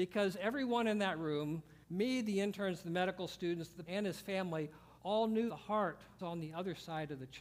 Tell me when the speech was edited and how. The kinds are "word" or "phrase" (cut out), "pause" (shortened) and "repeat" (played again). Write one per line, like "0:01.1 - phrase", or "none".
0:01.8 - pause
0:03.9 - word
0:05.0 - pause
0:05.5 - word
0:06.2 - word